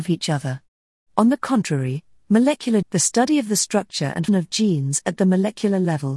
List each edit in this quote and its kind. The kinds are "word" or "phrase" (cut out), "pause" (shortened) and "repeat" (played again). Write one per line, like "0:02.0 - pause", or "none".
0:02.8 - word
0:04.3 - word